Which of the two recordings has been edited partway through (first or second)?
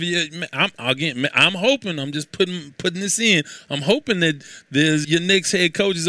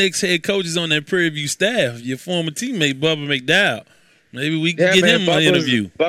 first